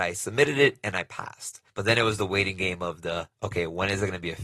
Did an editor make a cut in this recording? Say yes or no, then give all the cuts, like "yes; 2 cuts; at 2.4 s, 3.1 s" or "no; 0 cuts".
yes; 2 cuts; at 1.7 s, 3.3 s